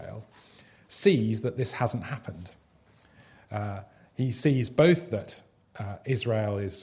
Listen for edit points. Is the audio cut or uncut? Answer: uncut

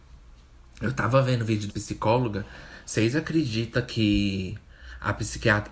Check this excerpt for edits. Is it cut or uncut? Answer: cut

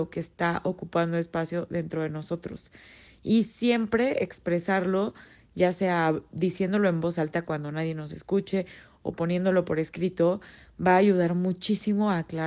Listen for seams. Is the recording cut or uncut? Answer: uncut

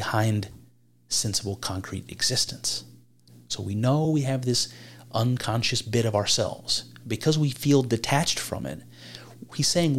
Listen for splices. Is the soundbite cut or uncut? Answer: uncut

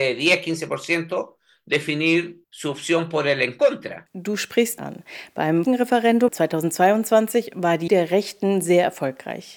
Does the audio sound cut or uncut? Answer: cut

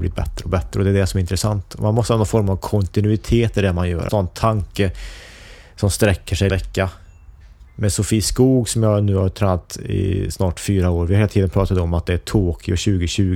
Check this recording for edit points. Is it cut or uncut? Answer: cut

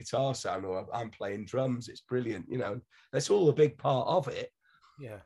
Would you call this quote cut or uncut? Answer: uncut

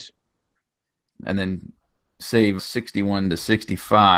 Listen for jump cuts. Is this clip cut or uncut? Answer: cut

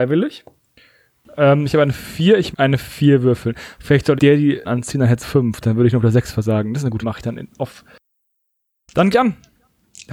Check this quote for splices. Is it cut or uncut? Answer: cut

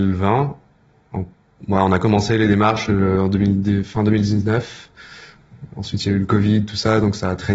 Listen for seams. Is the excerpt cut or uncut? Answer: uncut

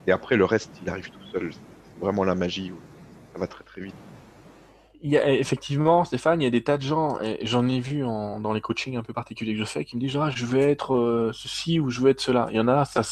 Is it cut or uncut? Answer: uncut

